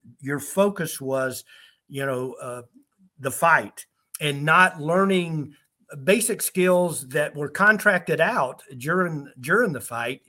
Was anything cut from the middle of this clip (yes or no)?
no